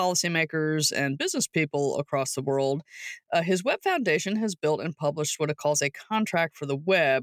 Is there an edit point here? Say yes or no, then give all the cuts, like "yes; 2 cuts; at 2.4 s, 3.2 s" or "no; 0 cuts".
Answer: no; 0 cuts